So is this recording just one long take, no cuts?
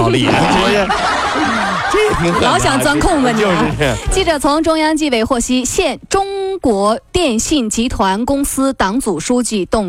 no; 1 cut; at 7.1 s

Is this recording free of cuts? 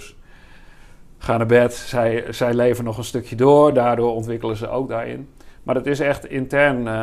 yes; 0 cuts

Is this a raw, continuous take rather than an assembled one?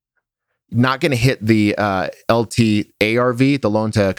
yes; 0 cuts

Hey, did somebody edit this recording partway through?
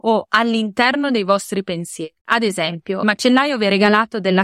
yes; 2 cuts; at 2.2 s, 3.0 s

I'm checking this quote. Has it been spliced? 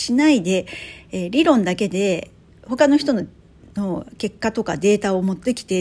no; 0 cuts

